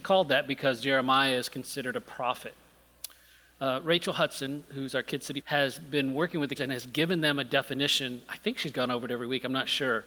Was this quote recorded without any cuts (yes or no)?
no